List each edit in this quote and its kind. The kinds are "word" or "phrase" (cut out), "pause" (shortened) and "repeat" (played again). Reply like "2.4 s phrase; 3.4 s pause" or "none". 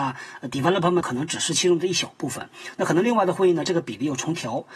1.0 s word